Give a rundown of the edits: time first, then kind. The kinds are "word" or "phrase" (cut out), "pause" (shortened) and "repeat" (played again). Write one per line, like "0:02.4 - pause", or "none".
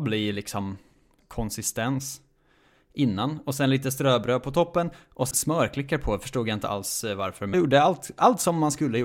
0:01.2 - word
0:05.3 - word
0:07.5 - word